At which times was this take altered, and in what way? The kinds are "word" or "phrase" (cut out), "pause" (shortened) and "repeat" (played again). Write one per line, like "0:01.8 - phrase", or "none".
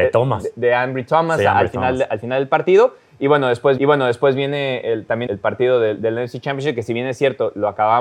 0:03.8 - repeat
0:05.3 - word

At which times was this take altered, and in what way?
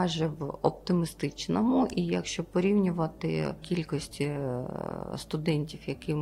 0:03.6 - word

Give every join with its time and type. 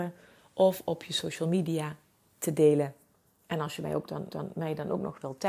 0:04.3 - repeat

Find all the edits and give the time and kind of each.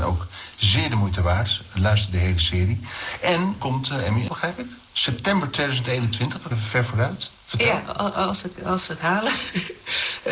0:03.6 - word
0:04.3 - word
0:06.5 - word

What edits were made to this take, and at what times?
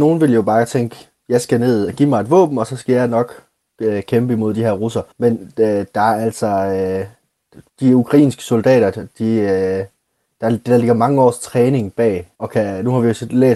0:05.1 - pause
0:07.7 - pause
0:12.3 - pause

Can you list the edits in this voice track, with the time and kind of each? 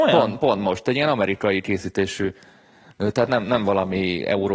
none

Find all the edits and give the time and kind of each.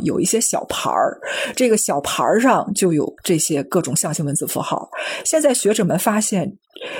0:03.2 - pause

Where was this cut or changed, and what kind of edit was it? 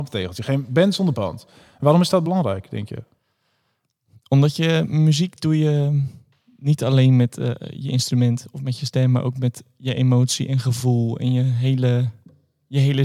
none

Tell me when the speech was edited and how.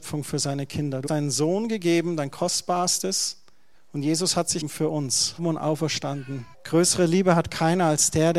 0:01.1 - word
0:03.7 - pause
0:04.6 - word
0:05.4 - phrase
0:06.5 - pause

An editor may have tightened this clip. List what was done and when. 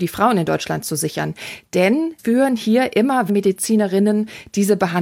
0:02.2 - word
0:03.3 - word

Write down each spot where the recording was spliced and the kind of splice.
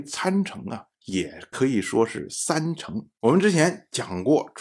0:00.9 - pause

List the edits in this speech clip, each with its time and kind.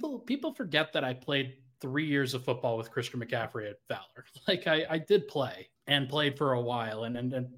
0:05.8 - pause

